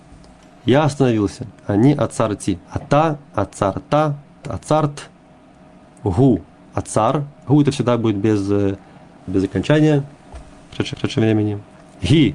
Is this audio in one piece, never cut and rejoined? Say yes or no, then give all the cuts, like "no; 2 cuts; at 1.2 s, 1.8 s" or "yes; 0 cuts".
no; 6 cuts; at 1.6 s, 2.6 s, 4.4 s, 7.4 s, 9.3 s, 10.9 s